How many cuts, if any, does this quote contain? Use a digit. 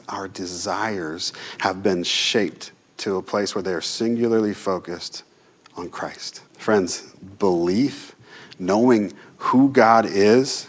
1